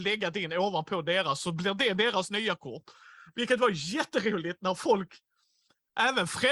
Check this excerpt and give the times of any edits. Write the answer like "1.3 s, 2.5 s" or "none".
none